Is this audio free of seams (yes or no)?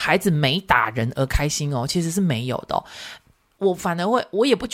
yes